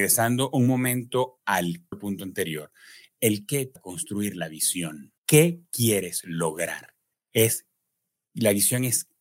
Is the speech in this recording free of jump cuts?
no; 4 cuts; at 1.9 s, 3.8 s, 5.2 s, 7.1 s

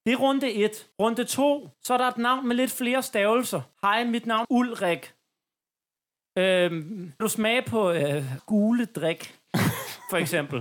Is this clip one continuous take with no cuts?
no; 6 cuts; at 0.9 s, 1.7 s, 3.7 s, 4.4 s, 7.2 s, 8.4 s

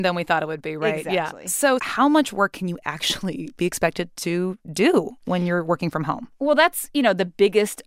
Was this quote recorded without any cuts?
yes; 0 cuts

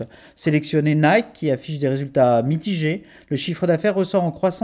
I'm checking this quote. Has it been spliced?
no; 0 cuts

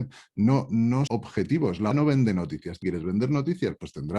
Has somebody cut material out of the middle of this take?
yes; 3 cuts; at 1.1 s, 1.9 s, 2.8 s

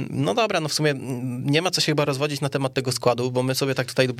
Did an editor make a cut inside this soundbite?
no; 0 cuts

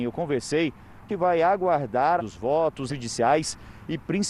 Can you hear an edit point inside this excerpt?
yes; 3 cuts; at 1.1 s, 2.2 s, 2.9 s

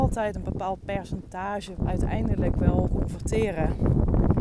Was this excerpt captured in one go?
no; 2 cuts; at 1.8 s, 2.9 s

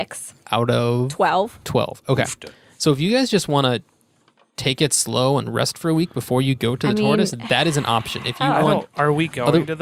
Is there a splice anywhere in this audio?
no; 0 cuts

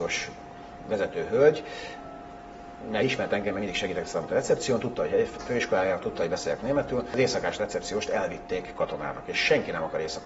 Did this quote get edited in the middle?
no; 0 cuts

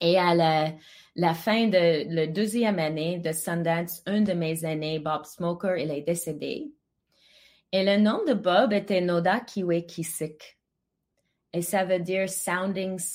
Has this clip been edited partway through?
no; 0 cuts

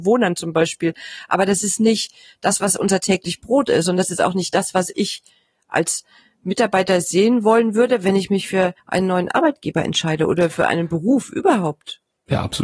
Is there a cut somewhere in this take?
yes; 1 cut; at 8.8 s

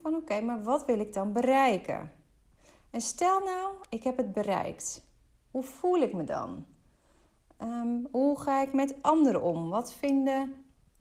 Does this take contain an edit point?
no; 0 cuts

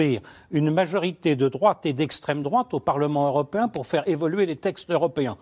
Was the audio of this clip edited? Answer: no; 0 cuts

